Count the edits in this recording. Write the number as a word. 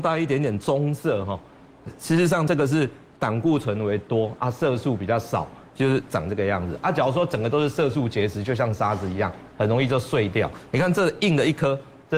one